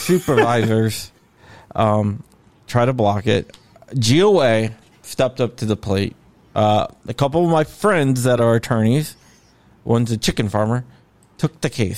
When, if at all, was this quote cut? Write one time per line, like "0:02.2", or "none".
none